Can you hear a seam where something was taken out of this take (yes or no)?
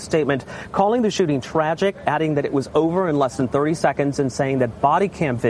no